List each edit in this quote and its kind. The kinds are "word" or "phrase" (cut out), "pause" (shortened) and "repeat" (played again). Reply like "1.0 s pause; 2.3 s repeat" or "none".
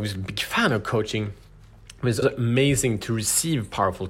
2.2 s word

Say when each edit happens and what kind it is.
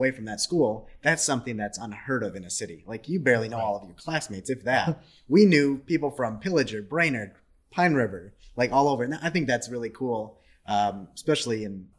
none

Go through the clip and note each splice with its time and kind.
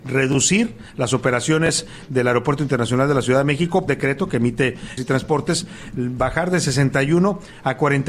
3.9 s phrase; 5.0 s phrase

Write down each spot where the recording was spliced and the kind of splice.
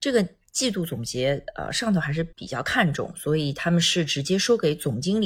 2.3 s pause

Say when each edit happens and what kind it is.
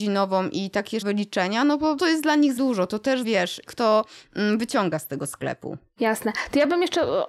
1.0 s word; 2.0 s phrase; 2.6 s word; 3.2 s word; 3.7 s word

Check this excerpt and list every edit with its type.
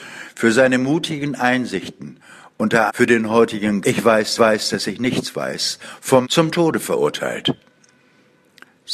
2.9 s word; 3.8 s word; 4.4 s repeat; 6.2 s word

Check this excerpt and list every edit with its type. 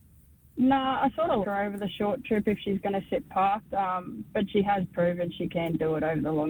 1.4 s word

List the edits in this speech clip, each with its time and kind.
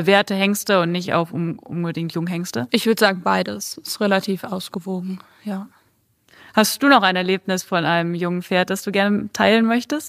none

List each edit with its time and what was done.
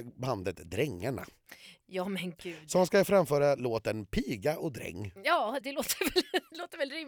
5.6 s word

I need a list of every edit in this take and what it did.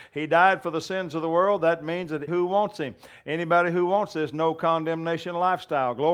2.3 s word

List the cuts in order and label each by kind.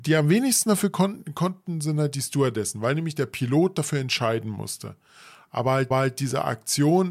5.9 s repeat

